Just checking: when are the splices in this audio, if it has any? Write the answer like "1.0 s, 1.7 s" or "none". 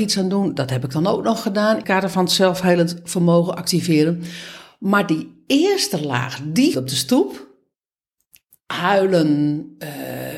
1.8 s, 6.7 s